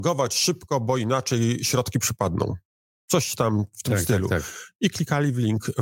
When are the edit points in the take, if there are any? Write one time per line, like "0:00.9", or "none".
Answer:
none